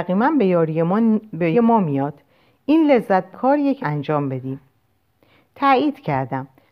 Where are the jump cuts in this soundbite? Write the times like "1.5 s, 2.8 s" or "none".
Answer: 1.5 s, 3.3 s, 3.8 s